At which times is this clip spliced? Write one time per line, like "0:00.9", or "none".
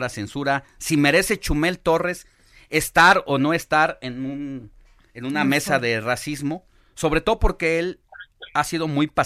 none